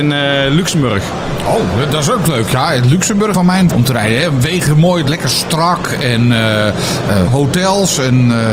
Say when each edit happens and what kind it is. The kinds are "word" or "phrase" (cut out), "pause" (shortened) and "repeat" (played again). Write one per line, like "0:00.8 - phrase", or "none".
0:03.3 - phrase
0:03.7 - phrase
0:07.3 - word